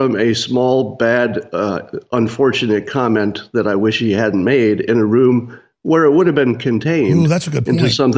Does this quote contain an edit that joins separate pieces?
no; 0 cuts

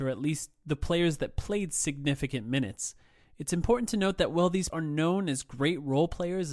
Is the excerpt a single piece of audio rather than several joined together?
no; 1 cut; at 4.7 s

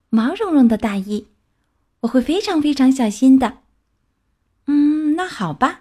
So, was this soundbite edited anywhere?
no; 0 cuts

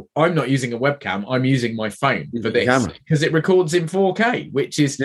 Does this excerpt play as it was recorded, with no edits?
yes; 0 cuts

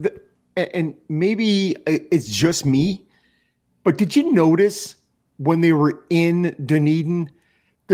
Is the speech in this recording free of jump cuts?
yes; 0 cuts

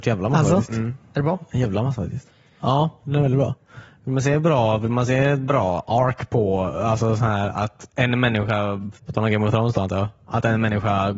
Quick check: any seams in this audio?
yes; 1 cut; at 9.0 s

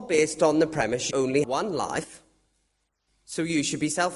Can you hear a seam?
yes; 2 cuts; at 1.1 s, 1.4 s

